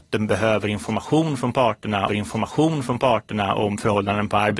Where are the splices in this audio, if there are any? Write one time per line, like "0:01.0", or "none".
0:02.1